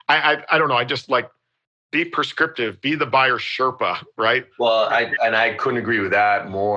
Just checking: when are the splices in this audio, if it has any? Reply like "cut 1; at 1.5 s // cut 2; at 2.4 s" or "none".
cut 1; at 4.5 s